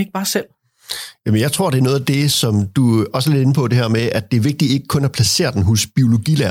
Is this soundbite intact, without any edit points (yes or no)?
yes